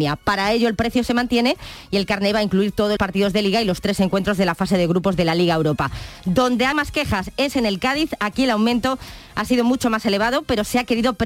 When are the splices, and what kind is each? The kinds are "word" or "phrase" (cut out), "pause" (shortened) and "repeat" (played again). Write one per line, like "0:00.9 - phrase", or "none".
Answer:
0:03.0 - word
0:06.7 - word